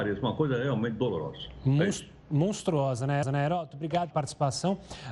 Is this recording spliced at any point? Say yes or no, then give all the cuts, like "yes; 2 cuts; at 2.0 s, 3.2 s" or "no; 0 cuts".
yes; 2 cuts; at 3.2 s, 4.1 s